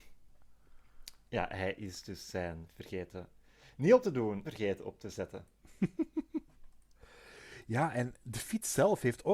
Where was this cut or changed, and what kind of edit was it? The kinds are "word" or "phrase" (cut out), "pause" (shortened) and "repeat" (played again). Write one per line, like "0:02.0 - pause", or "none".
0:02.7 - word
0:04.0 - word
0:04.4 - phrase
0:06.4 - pause

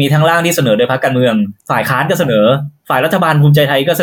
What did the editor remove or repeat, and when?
0:01.6 - pause

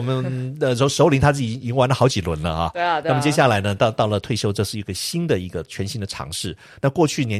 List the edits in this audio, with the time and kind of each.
none

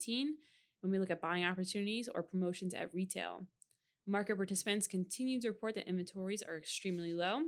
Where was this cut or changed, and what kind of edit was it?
none

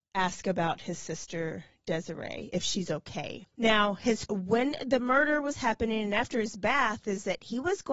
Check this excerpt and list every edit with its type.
0:03.5 - pause
0:04.3 - word

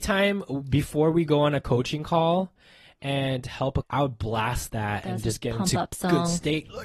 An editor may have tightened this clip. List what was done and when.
0:03.8 - word

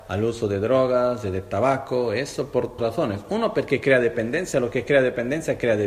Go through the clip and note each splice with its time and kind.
0:02.8 - word

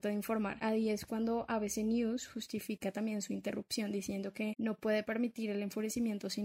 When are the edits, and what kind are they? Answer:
none

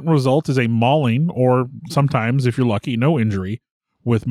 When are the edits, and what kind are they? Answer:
0:01.9 - word

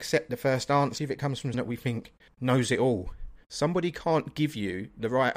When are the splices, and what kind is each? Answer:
0:01.0 - word
0:01.5 - word
0:02.3 - pause
0:03.4 - pause

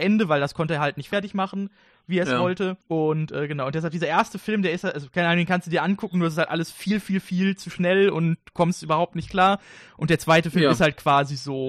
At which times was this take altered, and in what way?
0:02.8 - pause

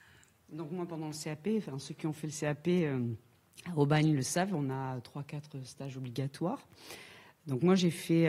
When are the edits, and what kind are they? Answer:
none

